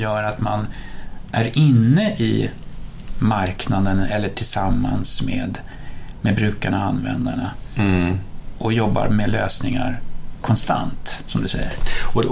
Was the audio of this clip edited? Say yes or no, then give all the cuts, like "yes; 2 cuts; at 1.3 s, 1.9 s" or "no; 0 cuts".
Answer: no; 0 cuts